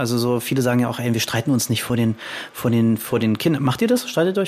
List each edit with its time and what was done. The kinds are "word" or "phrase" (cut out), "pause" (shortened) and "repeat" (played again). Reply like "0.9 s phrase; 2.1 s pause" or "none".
none